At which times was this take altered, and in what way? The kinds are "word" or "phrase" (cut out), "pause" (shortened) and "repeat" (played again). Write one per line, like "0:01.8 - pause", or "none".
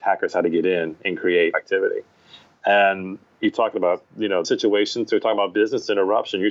0:01.5 - word
0:03.3 - pause
0:04.4 - word